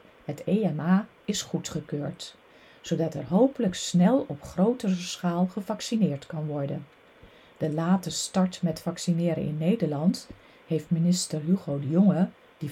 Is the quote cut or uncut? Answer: uncut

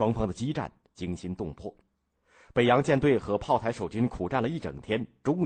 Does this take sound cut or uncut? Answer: uncut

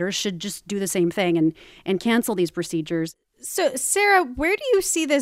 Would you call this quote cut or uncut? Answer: uncut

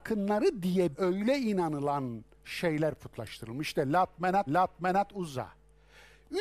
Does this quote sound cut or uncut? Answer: cut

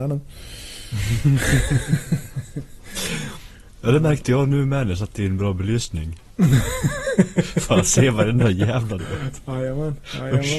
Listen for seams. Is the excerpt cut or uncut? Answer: cut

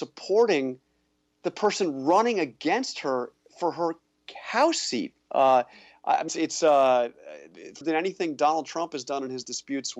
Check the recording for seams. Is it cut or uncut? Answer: cut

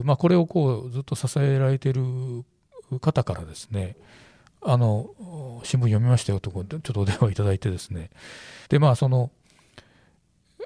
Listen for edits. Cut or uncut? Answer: cut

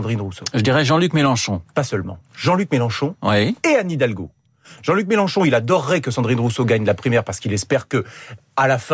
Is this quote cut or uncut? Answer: uncut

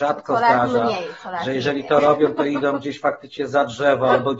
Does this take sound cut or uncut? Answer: uncut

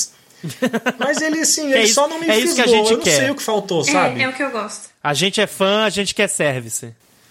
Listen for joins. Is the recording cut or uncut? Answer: uncut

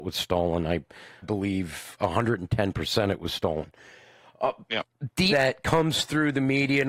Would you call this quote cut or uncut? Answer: cut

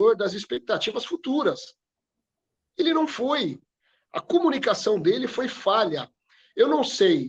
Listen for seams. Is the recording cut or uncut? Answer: uncut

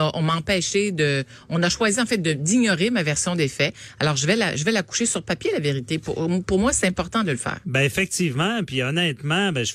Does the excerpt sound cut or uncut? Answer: uncut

